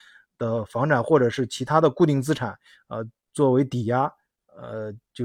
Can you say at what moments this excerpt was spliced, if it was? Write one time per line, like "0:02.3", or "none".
none